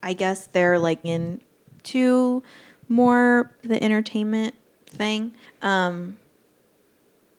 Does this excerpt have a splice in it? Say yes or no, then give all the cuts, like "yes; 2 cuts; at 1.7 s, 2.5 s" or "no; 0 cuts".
yes; 3 cuts; at 1.0 s, 3.6 s, 5.4 s